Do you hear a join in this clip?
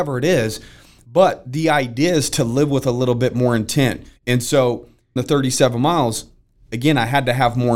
yes; 2 cuts; at 4.2 s, 5.2 s

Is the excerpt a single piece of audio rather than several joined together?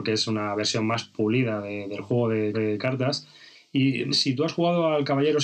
no; 2 cuts; at 2.5 s, 4.1 s

